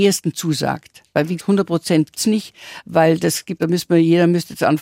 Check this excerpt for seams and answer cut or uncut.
cut